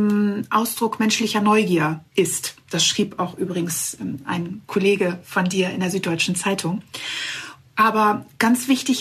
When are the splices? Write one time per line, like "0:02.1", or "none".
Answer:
none